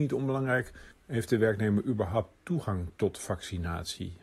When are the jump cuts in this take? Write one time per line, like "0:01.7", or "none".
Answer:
0:00.9